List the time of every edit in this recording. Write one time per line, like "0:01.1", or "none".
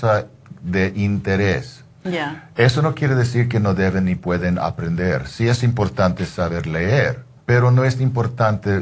0:07.4